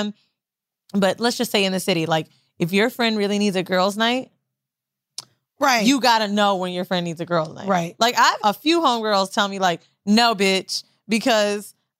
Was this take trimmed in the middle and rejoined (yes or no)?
yes